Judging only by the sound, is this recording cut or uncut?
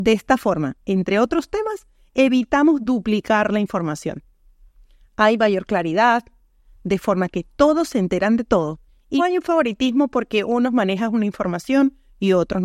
cut